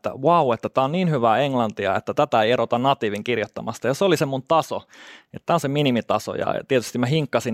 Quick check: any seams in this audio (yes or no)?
no